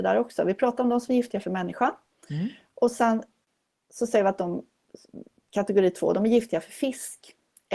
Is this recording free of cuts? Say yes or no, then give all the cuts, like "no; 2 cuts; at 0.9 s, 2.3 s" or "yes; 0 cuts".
yes; 0 cuts